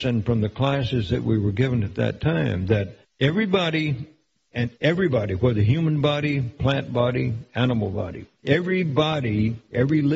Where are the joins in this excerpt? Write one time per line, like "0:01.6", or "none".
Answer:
0:03.0
0:04.7